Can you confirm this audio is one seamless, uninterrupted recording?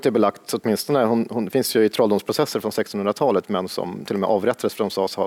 yes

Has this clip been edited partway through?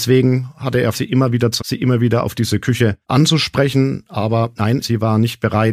yes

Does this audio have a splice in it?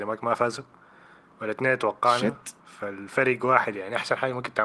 yes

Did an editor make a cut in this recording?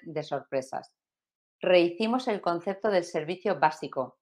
no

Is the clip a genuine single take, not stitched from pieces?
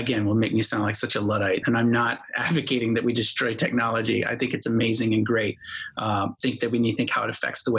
no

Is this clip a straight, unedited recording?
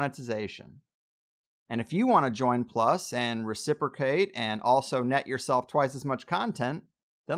yes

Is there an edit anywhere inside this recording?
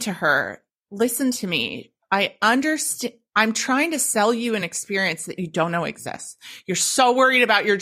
no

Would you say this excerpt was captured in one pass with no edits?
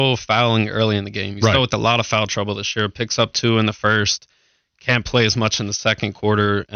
yes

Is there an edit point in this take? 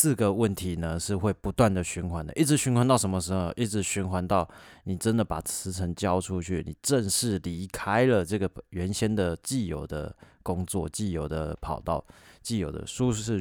no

